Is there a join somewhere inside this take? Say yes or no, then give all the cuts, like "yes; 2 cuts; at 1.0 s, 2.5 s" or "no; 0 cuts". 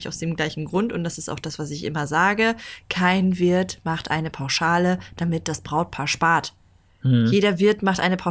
no; 0 cuts